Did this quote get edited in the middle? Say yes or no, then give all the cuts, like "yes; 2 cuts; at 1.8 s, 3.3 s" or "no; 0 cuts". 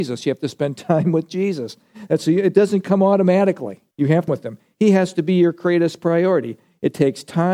yes; 2 cuts; at 3.9 s, 4.3 s